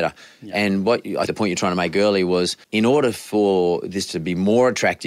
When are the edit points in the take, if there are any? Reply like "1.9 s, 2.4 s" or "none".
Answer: 1.3 s, 2.6 s